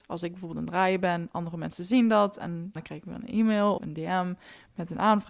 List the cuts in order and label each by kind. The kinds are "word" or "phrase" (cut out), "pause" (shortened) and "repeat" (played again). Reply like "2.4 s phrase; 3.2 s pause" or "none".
2.8 s word; 3.8 s word